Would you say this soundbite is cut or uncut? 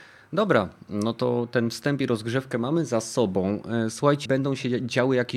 cut